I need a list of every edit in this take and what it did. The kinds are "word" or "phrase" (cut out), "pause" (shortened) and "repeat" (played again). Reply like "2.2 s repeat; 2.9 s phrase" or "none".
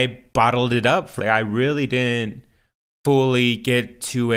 1.2 s word